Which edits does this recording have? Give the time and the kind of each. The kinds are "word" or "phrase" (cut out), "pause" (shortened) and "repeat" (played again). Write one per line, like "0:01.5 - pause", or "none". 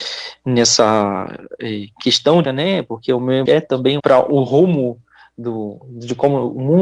0:02.4 - word
0:03.5 - word
0:04.0 - phrase